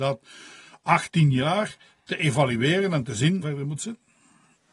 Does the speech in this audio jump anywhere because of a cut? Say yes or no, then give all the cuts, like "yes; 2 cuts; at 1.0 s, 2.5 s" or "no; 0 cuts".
yes; 2 cuts; at 1.1 s, 3.4 s